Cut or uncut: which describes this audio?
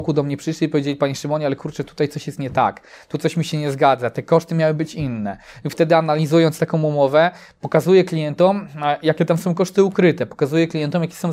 uncut